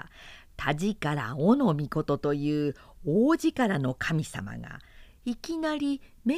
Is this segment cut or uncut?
uncut